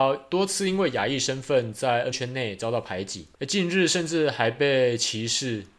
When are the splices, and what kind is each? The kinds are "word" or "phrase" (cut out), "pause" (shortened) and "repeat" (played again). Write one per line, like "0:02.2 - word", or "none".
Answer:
0:02.1 - word
0:03.3 - pause